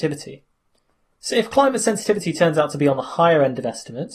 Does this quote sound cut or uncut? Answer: uncut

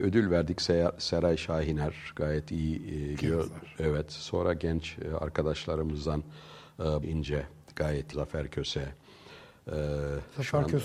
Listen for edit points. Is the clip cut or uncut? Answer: cut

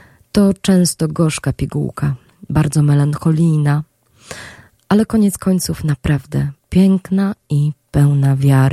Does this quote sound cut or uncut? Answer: uncut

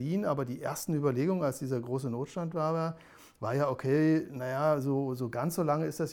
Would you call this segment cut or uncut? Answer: uncut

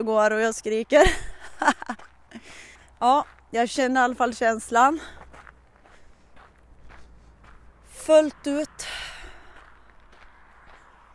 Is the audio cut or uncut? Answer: cut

